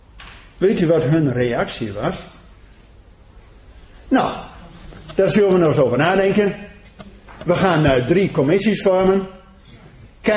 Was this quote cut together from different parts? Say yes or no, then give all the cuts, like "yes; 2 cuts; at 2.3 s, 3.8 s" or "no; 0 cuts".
no; 0 cuts